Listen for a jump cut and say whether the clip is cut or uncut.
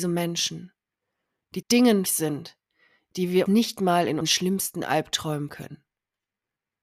cut